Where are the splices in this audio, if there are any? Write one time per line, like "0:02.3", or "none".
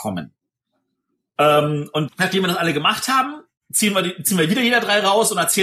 0:02.1